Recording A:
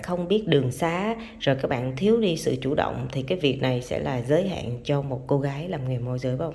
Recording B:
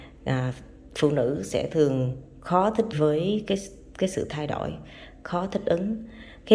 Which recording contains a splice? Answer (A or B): B